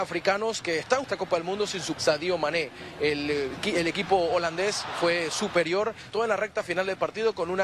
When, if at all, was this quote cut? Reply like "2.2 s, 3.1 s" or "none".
1.0 s, 1.9 s, 6.1 s